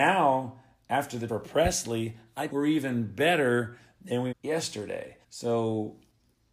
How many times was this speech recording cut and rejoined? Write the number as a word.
four